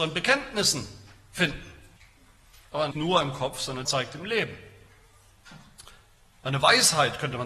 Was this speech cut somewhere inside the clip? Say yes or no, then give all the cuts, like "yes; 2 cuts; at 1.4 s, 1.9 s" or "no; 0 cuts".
yes; 3 cuts; at 2.0 s, 2.9 s, 3.8 s